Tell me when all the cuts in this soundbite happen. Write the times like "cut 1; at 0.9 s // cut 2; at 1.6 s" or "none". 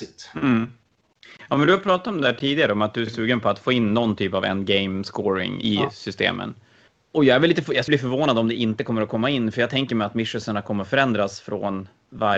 cut 1; at 3.1 s // cut 2; at 5.6 s // cut 3; at 7.9 s